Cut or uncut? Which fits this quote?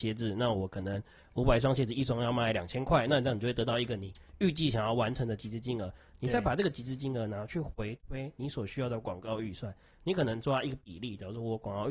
uncut